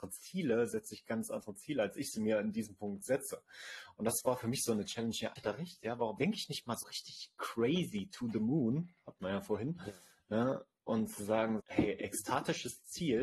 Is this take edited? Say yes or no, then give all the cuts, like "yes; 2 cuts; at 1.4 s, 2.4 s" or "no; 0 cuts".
yes; 4 cuts; at 5.4 s, 6.2 s, 6.8 s, 11.6 s